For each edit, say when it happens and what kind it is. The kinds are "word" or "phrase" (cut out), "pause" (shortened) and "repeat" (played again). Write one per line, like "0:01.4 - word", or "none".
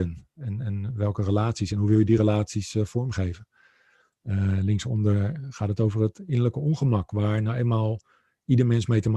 none

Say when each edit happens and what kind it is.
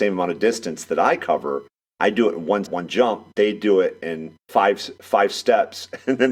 0:02.6 - word
0:04.4 - pause

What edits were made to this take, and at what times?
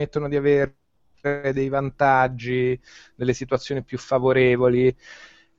none

